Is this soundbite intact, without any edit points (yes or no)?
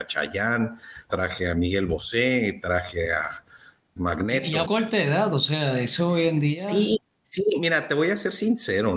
no